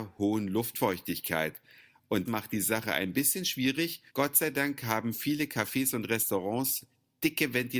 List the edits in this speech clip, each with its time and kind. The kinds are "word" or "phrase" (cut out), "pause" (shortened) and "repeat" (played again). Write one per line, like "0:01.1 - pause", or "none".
0:02.3 - word
0:04.1 - pause